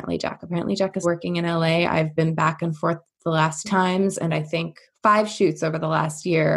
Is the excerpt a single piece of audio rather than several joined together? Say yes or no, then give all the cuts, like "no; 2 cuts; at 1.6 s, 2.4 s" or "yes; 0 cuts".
no; 3 cuts; at 1.0 s, 3.6 s, 4.3 s